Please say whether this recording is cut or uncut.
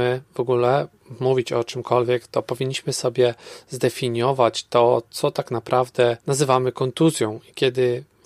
cut